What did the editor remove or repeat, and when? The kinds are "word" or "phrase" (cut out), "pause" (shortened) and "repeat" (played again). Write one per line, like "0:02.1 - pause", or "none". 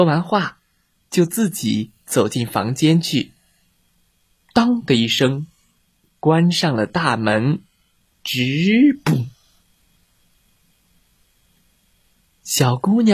0:08.0 - pause